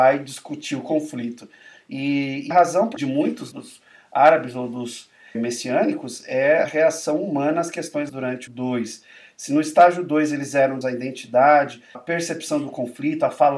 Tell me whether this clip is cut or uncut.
cut